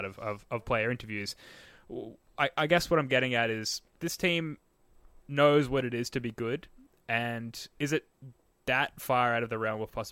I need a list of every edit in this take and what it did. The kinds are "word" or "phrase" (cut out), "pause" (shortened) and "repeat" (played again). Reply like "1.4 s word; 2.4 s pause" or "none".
4.0 s word; 7.8 s word